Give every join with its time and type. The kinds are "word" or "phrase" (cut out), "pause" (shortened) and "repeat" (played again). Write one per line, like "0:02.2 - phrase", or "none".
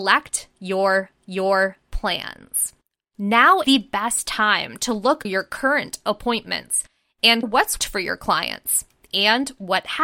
0:01.2 - repeat
0:03.6 - word
0:05.2 - word
0:07.4 - word
0:07.8 - word